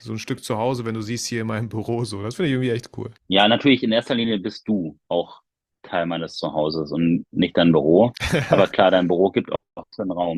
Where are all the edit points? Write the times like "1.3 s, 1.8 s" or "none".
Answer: 3.2 s, 5.0 s, 7.2 s

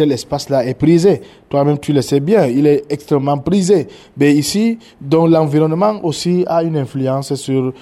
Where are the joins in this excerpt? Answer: none

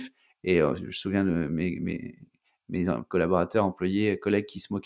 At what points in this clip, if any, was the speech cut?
none

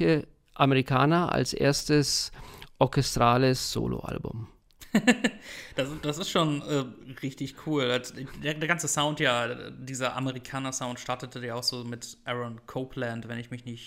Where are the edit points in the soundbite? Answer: none

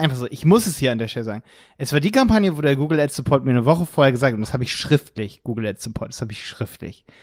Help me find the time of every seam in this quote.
none

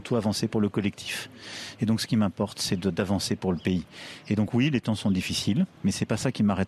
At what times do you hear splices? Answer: 5.7 s

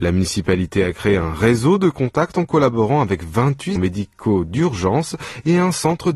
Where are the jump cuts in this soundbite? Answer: 3.8 s

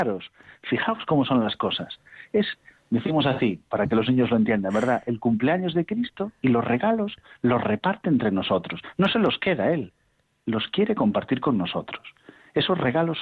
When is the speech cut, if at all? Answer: none

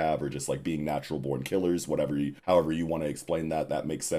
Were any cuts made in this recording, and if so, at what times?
2.4 s

